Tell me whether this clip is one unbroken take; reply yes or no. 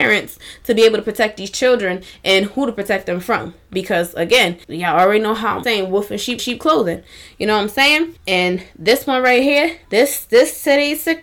no